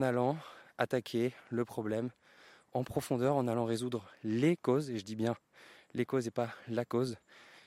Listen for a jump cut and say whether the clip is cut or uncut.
uncut